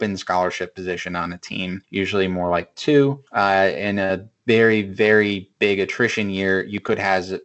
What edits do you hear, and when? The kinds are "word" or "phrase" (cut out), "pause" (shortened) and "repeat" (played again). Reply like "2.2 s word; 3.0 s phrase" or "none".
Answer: 1.8 s pause; 3.3 s pause